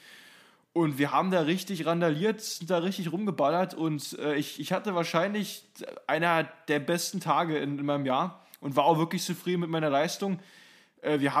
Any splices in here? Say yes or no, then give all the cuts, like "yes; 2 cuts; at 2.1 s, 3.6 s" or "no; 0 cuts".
no; 0 cuts